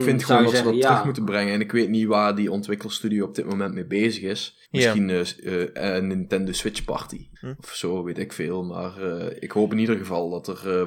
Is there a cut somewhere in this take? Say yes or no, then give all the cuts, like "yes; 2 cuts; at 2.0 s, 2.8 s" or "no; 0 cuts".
yes; 2 cuts; at 4.6 s, 7.4 s